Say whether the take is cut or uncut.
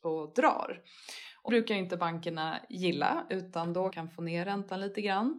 cut